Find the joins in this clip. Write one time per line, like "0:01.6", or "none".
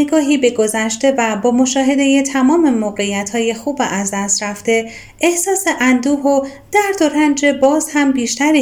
none

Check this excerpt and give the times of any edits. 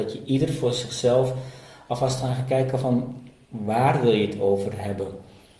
none

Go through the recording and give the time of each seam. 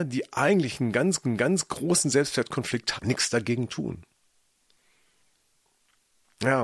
0:01.2
0:03.0

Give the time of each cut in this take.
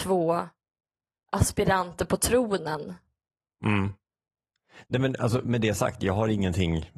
none

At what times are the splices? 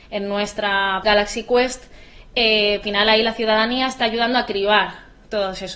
0:01.0
0:02.8

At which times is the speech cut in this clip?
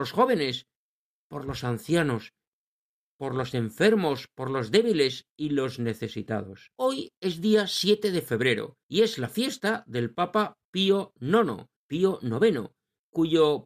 0:06.8
0:08.8
0:11.8

